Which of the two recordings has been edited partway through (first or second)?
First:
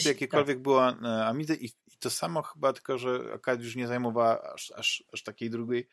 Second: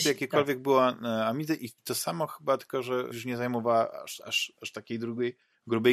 second